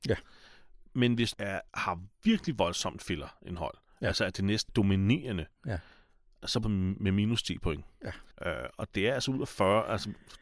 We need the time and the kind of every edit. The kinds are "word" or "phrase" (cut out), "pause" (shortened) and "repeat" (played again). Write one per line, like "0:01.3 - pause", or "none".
0:01.3 - word
0:01.7 - pause
0:04.7 - word
0:06.6 - phrase
0:08.3 - pause